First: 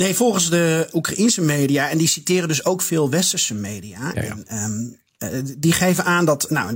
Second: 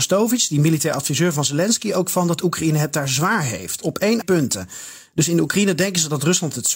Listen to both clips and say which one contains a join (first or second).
second